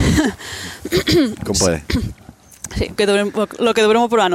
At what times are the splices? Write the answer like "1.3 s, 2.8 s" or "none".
1.5 s, 3.0 s